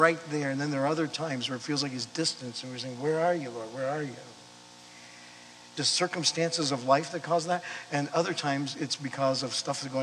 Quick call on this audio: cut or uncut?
cut